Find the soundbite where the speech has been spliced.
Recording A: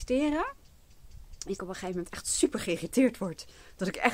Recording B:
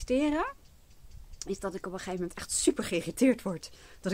A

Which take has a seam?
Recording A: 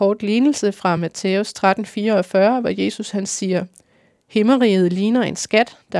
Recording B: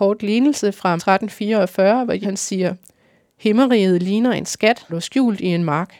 B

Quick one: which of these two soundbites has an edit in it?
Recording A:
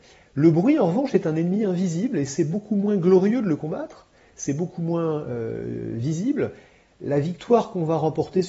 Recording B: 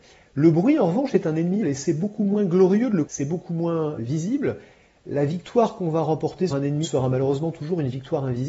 B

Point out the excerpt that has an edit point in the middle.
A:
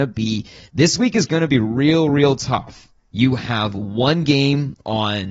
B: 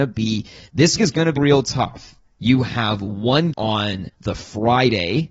B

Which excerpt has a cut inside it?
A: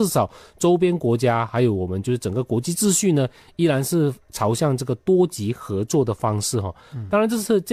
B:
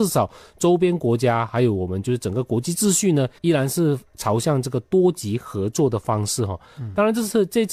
B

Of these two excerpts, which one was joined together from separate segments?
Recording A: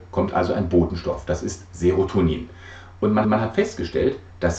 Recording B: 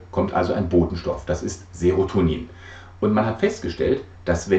A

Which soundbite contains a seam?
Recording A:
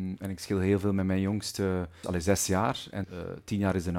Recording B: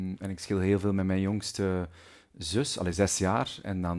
A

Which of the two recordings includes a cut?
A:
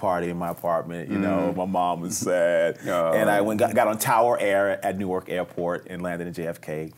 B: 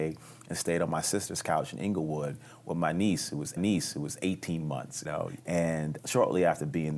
B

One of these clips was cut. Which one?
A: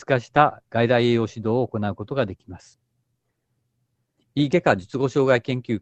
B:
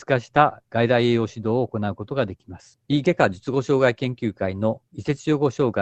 B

